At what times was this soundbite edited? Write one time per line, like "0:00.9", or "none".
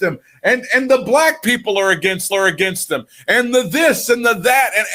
0:02.3

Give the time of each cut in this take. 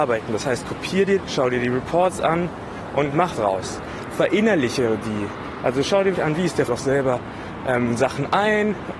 0:01.2
0:03.3
0:06.1
0:06.7

